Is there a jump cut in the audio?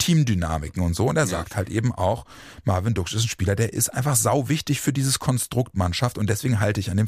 no; 0 cuts

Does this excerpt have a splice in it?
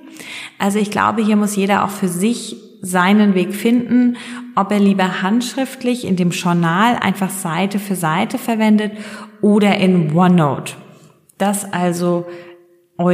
no; 0 cuts

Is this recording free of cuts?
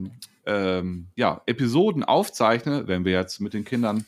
no; 1 cut; at 1.1 s

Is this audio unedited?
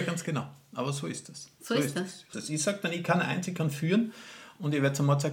no; 1 cut; at 2.3 s

